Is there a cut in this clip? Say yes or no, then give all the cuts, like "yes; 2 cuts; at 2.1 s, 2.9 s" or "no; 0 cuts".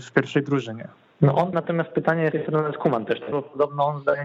yes; 4 cuts; at 0.9 s, 1.5 s, 2.3 s, 3.3 s